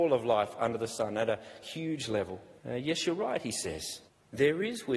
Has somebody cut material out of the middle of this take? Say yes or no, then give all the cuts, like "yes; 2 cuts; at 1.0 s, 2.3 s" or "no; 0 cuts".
yes; 2 cuts; at 2.6 s, 4.1 s